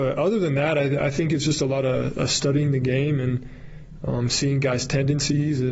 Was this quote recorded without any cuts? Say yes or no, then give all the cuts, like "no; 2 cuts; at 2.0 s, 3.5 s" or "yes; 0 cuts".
yes; 0 cuts